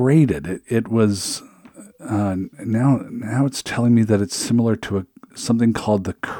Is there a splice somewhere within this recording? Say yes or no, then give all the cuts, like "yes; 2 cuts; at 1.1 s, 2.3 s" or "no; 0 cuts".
no; 0 cuts